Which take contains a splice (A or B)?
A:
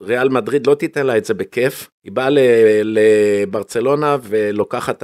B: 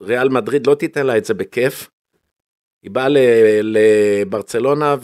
A